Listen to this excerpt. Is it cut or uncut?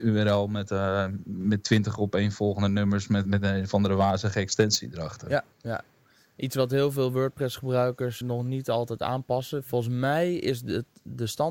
cut